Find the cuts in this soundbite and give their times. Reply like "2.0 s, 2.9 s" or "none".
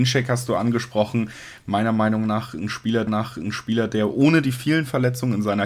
3.1 s